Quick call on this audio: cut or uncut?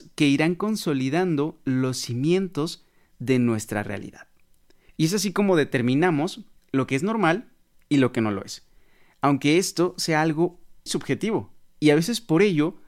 cut